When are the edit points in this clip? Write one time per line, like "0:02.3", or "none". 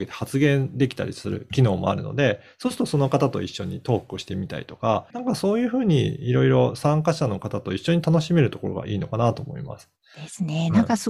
0:05.1

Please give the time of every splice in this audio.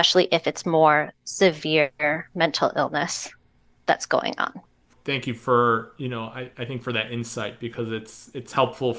none

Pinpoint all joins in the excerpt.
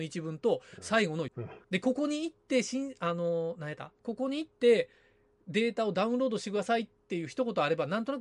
0:01.3
0:01.6
0:04.0

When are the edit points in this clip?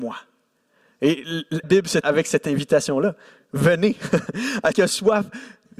0:01.6
0:02.0
0:04.7

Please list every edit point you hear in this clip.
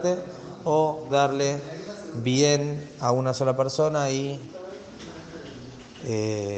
0:01.1

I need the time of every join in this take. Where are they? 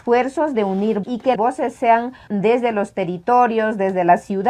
0:01.0
0:01.4
0:02.3

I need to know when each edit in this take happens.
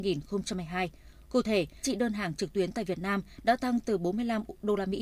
0:01.8

